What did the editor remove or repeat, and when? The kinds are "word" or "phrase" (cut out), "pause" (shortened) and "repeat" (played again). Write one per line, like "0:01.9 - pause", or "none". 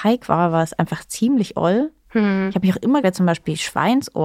0:03.0 - word